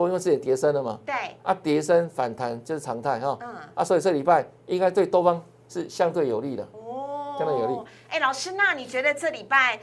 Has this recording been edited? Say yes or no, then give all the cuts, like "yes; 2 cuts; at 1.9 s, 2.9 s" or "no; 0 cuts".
no; 0 cuts